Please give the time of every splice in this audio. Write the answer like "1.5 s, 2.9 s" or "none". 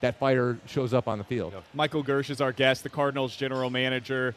1.7 s